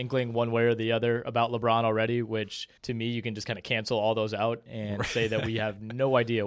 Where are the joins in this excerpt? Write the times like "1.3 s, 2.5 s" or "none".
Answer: 2.8 s